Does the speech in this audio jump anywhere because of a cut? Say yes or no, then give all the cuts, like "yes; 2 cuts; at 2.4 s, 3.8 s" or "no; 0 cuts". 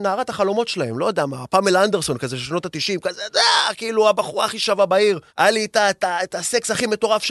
yes; 1 cut; at 5.3 s